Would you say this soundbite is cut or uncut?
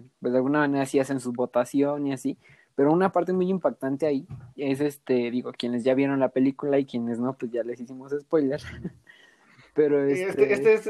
uncut